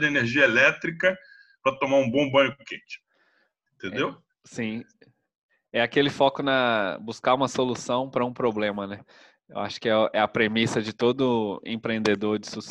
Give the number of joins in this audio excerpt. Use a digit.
0